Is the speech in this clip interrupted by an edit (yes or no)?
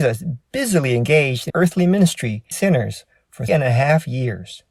yes